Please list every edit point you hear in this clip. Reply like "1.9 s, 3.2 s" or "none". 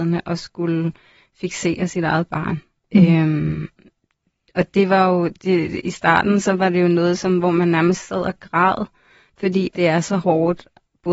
9.7 s